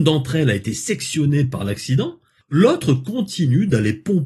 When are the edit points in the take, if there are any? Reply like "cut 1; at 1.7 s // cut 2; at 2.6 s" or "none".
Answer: none